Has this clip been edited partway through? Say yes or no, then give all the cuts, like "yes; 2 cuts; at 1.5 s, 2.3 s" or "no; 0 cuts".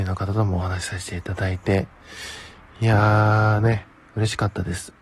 no; 0 cuts